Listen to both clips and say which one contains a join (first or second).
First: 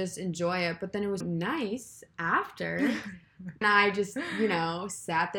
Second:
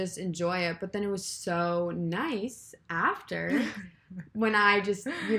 first